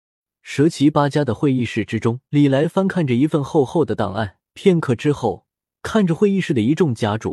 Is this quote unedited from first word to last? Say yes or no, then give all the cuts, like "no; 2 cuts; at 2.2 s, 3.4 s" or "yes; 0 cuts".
no; 2 cuts; at 2.2 s, 4.5 s